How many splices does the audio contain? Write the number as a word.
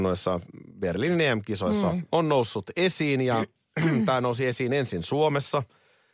zero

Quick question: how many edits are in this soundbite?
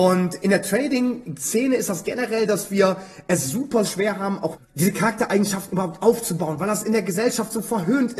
two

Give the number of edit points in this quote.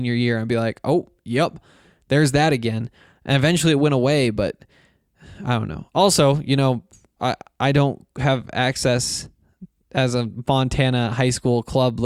zero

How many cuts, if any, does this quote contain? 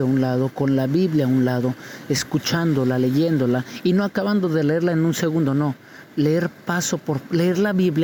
zero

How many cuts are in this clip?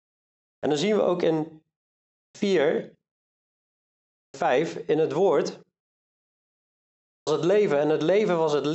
three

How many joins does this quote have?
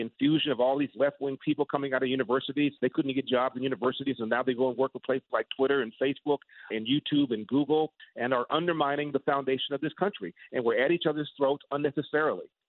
three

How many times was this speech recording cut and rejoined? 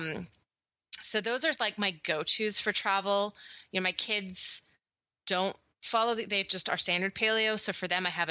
zero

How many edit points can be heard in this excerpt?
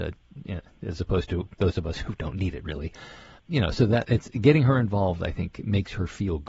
one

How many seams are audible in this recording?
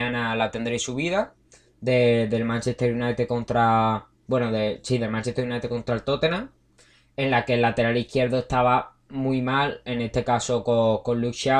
zero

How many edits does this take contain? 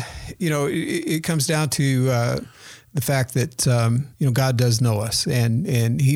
one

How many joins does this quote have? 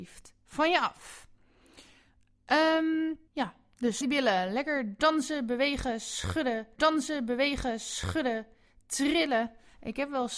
three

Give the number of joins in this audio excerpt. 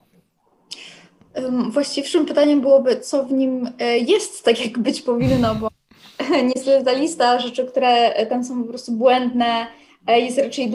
zero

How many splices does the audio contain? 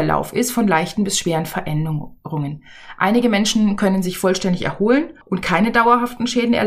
one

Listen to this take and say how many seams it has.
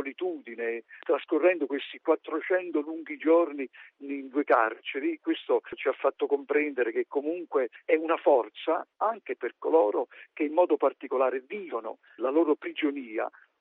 zero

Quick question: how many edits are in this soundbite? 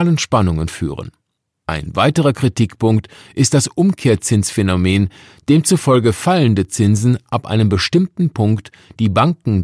zero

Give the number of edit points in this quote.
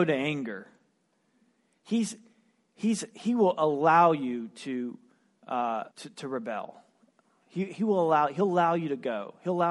one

